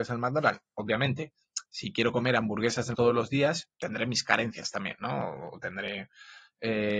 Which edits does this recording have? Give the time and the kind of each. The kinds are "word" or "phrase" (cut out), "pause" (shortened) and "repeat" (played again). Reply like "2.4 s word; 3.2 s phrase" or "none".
2.9 s word; 3.7 s word

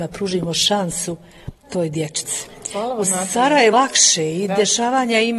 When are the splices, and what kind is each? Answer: 1.6 s pause; 3.7 s word

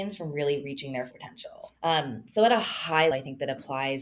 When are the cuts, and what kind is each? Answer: 1.1 s word; 1.8 s pause; 3.1 s word

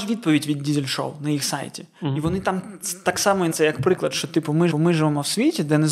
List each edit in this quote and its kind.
3.5 s word; 4.7 s repeat

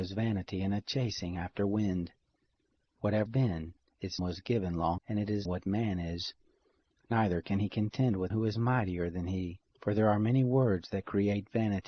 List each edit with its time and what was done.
3.3 s word; 4.2 s word; 5.0 s word; 5.5 s word; 8.3 s word; 9.7 s pause

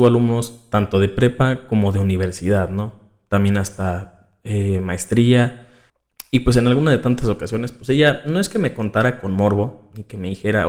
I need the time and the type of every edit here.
none

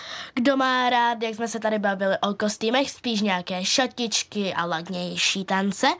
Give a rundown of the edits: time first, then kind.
none

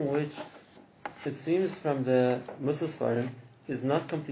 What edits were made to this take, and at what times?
1.1 s pause

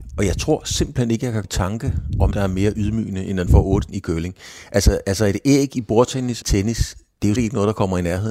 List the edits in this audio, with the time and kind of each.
1.4 s word; 2.3 s word; 3.5 s word; 3.9 s word; 6.4 s phrase; 7.4 s word

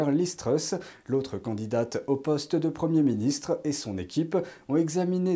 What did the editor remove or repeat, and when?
none

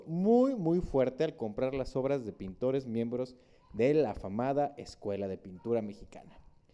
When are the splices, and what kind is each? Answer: none

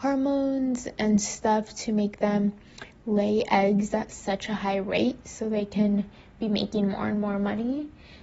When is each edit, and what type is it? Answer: none

